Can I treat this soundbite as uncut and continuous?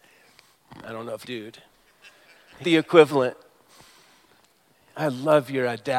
no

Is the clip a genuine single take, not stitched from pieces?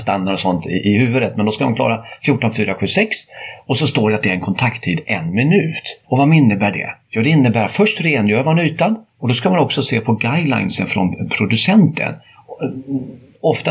no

